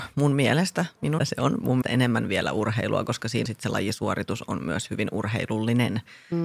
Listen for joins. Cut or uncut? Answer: cut